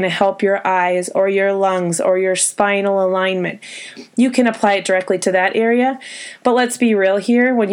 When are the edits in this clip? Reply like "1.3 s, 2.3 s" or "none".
none